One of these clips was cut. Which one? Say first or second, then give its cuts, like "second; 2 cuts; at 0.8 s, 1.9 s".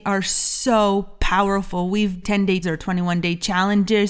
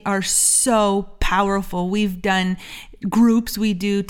first; 2 cuts; at 2.2 s, 2.6 s